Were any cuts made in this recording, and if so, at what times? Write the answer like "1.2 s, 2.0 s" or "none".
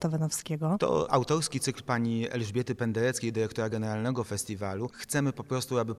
none